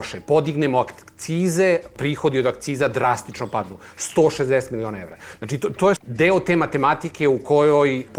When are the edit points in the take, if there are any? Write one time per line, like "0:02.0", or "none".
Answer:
0:06.0